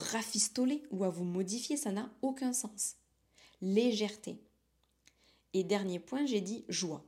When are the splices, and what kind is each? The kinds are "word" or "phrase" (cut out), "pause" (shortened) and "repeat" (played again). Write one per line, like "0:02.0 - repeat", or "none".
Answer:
none